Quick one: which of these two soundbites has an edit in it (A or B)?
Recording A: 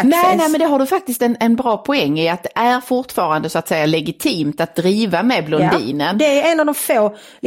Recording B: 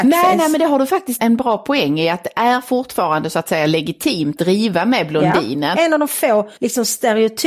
B